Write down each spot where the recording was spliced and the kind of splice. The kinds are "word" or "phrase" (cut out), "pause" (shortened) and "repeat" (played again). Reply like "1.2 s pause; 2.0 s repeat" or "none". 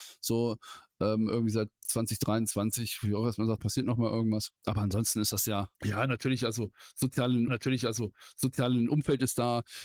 3.6 s word; 4.6 s pause; 5.7 s pause; 7.5 s repeat